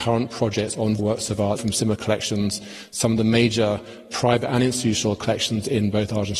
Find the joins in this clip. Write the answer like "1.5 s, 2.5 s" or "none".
none